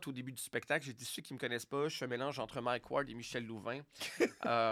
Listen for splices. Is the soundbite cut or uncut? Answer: uncut